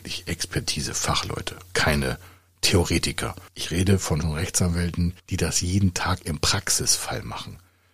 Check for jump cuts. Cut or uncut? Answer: cut